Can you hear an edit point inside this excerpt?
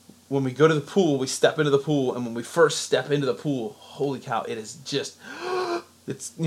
no; 0 cuts

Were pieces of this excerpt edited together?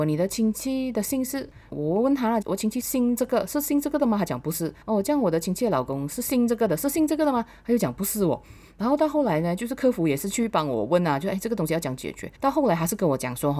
yes; 2 cuts; at 4.8 s, 12.3 s

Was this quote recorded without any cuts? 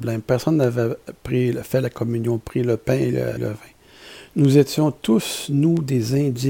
no; 1 cut; at 3.4 s

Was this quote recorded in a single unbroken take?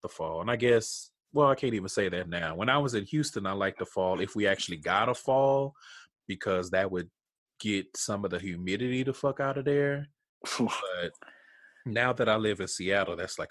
yes; 0 cuts

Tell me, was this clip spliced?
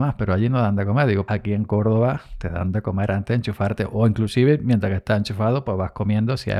yes; 1 cut; at 1.3 s

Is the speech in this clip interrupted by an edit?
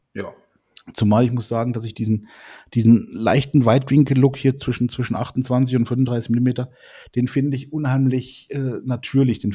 no; 0 cuts

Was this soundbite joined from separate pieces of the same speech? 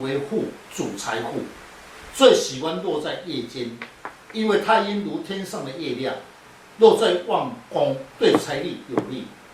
no; 0 cuts

